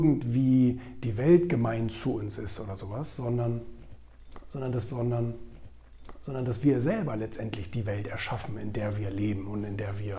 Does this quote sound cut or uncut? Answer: cut